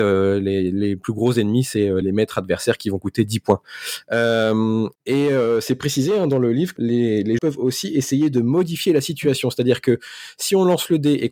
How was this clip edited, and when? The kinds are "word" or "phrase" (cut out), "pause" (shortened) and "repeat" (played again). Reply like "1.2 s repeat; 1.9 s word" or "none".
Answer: 2.0 s word; 5.0 s pause; 6.8 s word; 7.4 s word

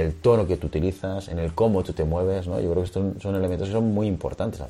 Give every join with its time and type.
none

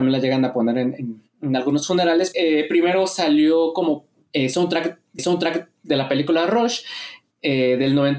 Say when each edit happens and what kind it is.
2.3 s word; 5.2 s repeat

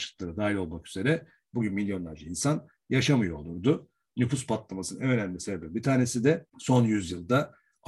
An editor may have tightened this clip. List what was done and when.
none

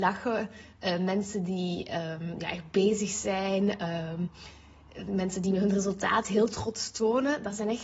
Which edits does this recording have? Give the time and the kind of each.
none

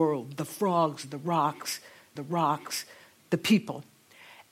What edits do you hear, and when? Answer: 2.2 s repeat

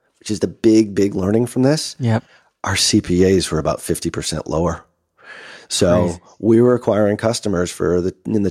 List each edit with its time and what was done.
none

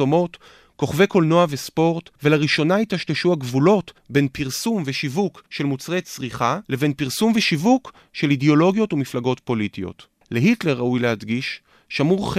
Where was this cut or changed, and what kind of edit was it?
2.2 s pause; 4.0 s pause; 5.5 s pause; 6.6 s pause; 10.2 s pause

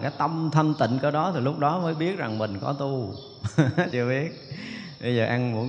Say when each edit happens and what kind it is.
3.9 s phrase

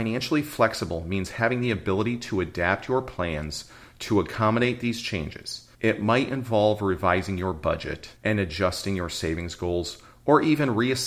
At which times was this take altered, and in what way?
5.7 s pause; 8.2 s pause

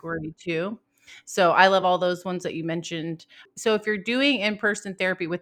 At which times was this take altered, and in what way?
none

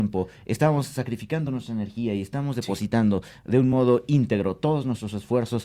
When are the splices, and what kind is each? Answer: none

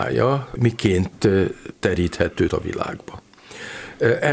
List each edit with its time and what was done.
2.5 s word

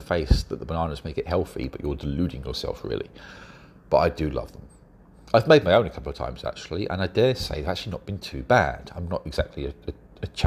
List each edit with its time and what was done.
none

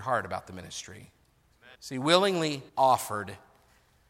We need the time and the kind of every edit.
1.7 s pause; 2.7 s pause

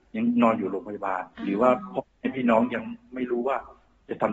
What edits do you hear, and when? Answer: 1.3 s pause

